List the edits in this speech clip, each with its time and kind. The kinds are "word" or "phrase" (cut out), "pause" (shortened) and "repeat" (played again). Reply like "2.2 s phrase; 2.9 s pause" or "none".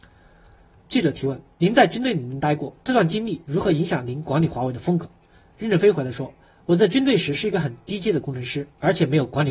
none

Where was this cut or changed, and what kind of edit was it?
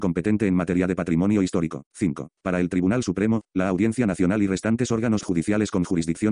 1.9 s pause

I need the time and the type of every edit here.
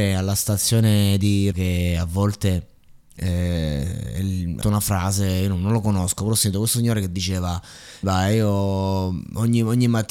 1.5 s word; 4.6 s word; 8.0 s word

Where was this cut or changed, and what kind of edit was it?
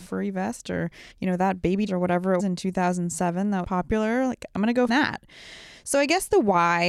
1.1 s pause; 1.9 s phrase; 2.4 s word; 3.6 s word; 4.9 s word

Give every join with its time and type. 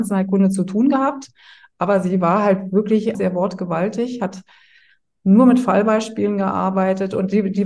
3.1 s phrase

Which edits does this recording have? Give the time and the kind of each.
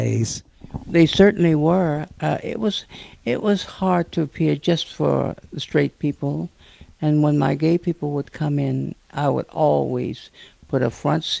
none

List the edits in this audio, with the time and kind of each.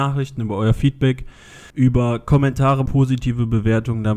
1.7 s pause; 2.9 s phrase

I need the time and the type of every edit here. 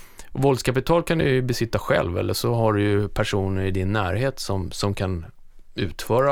none

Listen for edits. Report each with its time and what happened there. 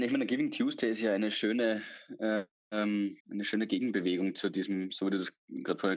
3.2 s pause

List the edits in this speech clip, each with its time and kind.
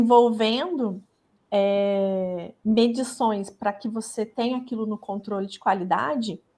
none

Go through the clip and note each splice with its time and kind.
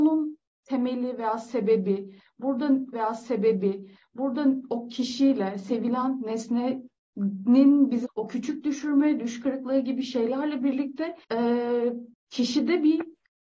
2.9 s repeat; 8.0 s word; 11.2 s pause

